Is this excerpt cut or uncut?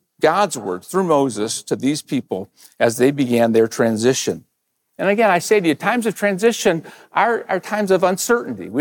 uncut